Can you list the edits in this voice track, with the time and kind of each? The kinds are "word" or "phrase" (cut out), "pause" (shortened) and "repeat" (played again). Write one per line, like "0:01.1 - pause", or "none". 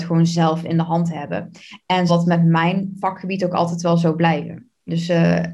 0:02.1 - word